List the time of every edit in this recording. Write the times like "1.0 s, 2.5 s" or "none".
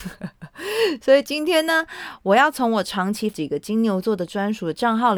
3.3 s